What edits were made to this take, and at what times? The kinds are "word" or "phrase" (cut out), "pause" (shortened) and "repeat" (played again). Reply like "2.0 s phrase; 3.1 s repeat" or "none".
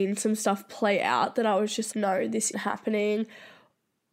1.9 s word; 2.5 s word